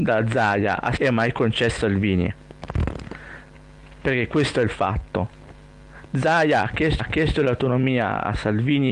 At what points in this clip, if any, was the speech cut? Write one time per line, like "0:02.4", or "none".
0:01.0
0:01.8
0:07.0